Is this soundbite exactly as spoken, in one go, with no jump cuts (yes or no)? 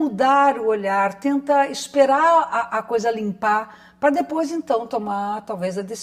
yes